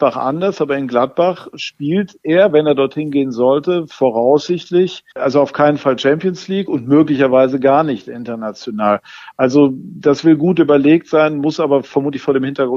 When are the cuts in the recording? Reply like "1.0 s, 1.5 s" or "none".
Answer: 5.1 s